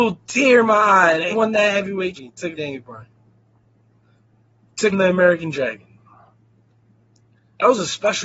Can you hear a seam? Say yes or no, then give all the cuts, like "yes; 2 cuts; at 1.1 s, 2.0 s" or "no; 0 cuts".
yes; 4 cuts; at 1.3 s, 2.1 s, 2.6 s, 4.9 s